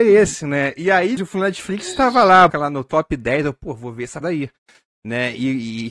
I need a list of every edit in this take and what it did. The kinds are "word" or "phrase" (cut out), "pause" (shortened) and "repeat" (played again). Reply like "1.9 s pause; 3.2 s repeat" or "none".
1.2 s word; 2.5 s word; 4.2 s word